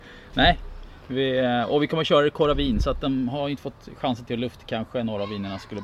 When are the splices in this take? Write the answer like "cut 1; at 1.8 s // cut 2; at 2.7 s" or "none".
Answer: cut 1; at 4.6 s